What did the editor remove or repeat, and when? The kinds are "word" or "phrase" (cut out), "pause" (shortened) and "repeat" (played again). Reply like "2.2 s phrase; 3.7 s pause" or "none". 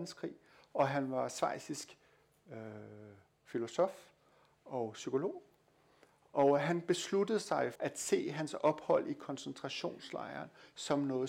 7.8 s word